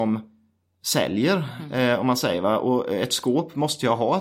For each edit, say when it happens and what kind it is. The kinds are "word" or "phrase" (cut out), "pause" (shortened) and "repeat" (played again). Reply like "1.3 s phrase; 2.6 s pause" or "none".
none